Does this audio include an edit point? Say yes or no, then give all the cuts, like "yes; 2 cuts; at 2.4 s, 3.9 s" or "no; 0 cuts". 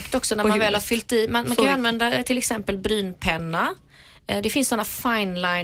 no; 0 cuts